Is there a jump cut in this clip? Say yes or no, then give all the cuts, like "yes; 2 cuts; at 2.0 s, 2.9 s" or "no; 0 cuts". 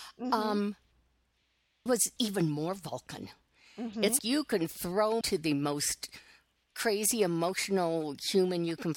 yes; 4 cuts; at 1.9 s, 2.2 s, 4.2 s, 5.2 s